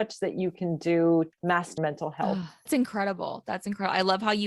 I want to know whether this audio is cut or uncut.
cut